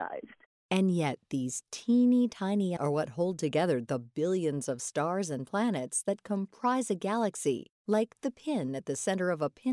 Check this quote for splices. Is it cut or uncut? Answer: cut